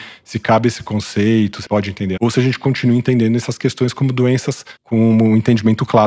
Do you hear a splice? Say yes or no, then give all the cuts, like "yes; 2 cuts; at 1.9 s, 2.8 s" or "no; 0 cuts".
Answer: yes; 3 cuts; at 1.6 s, 2.2 s, 4.8 s